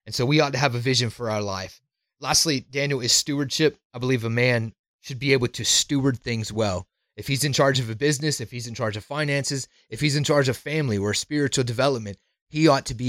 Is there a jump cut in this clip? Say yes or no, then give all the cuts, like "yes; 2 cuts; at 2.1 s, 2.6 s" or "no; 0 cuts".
no; 0 cuts